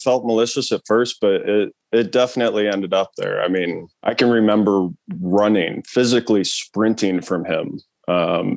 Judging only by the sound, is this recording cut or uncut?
cut